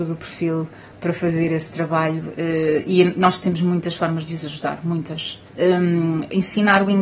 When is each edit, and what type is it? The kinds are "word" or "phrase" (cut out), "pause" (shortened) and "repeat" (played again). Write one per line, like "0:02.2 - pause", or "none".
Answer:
0:05.5 - pause